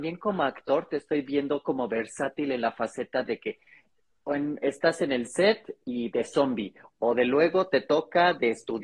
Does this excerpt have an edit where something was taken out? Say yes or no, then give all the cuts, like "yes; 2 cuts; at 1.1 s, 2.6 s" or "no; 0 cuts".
no; 0 cuts